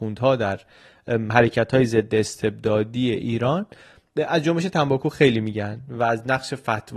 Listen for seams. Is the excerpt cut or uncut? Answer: uncut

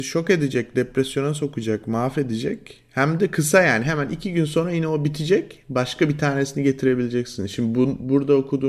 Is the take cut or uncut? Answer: uncut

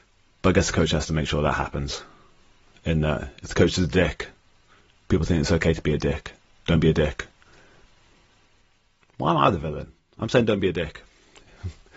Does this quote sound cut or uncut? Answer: uncut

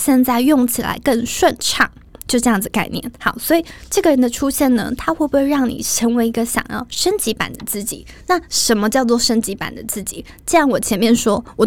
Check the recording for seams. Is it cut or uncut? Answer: uncut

